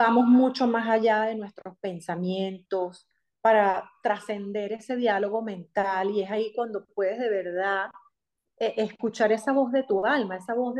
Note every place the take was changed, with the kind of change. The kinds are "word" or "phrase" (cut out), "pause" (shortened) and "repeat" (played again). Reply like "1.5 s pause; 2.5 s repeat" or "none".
none